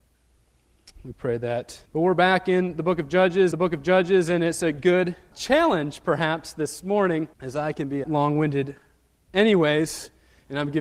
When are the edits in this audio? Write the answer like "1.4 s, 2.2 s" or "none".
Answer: 1.9 s, 3.5 s, 5.3 s, 7.3 s, 8.0 s